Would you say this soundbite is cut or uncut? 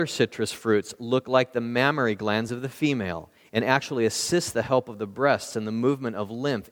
uncut